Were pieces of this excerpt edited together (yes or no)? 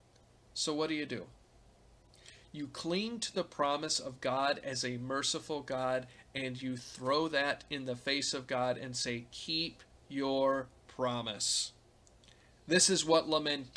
no